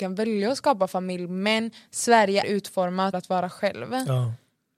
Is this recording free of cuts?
no; 2 cuts; at 2.4 s, 3.1 s

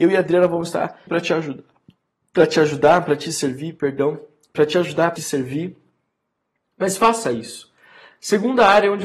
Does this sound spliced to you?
yes; 2 cuts; at 1.1 s, 5.2 s

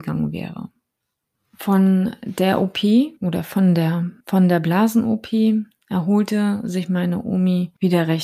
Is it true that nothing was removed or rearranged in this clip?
no; 2 cuts; at 3.2 s, 4.2 s

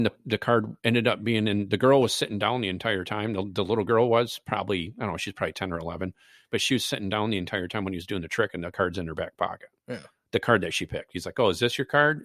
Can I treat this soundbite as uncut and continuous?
yes; 0 cuts

